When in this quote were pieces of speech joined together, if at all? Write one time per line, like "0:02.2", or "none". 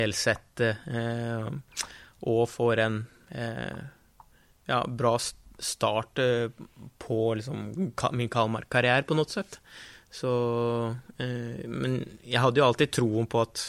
none